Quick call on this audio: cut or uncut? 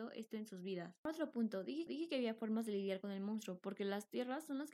cut